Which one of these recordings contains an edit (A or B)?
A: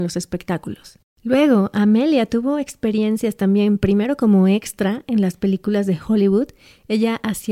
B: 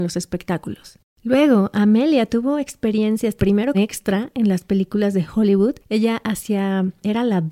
B